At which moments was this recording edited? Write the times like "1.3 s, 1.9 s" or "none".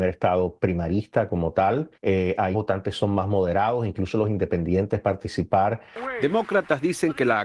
1.9 s, 2.5 s, 5.0 s

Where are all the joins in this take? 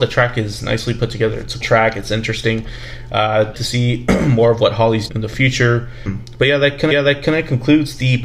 1.6 s, 3.5 s, 5.1 s, 6.9 s

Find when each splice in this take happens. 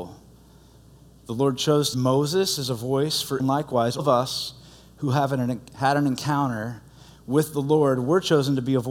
1.9 s, 3.4 s, 4.0 s

